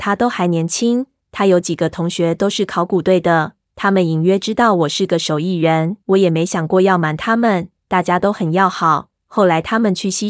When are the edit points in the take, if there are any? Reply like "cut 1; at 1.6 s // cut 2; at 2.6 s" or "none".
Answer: cut 1; at 6.0 s